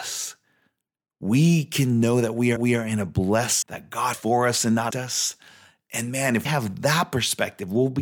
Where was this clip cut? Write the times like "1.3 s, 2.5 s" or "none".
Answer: 2.6 s, 3.6 s, 4.1 s, 4.9 s, 6.5 s